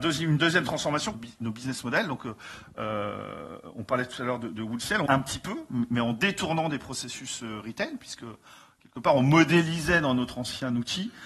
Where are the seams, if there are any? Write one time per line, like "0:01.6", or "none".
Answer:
0:01.1
0:05.1